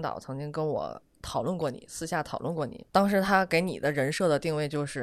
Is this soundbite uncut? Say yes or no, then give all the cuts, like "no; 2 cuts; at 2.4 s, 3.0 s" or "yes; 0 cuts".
no; 1 cut; at 2.9 s